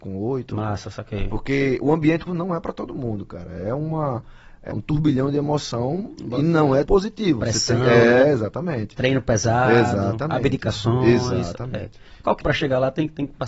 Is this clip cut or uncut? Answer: cut